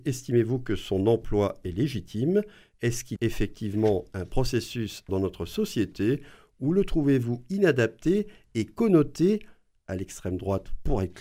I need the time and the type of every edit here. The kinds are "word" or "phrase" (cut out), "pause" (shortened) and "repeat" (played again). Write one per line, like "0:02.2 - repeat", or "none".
0:03.2 - word
0:05.1 - phrase